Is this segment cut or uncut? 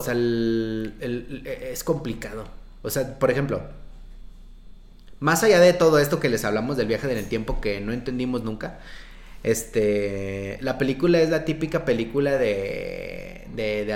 uncut